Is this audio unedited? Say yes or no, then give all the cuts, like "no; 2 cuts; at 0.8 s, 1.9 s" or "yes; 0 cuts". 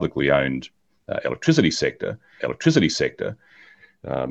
no; 1 cut; at 2.4 s